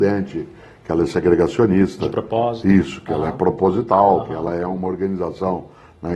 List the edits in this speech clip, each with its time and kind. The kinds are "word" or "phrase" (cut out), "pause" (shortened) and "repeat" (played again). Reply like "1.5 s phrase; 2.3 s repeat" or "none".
none